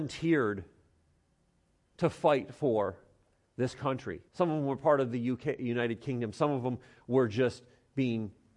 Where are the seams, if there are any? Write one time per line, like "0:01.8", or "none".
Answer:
0:04.3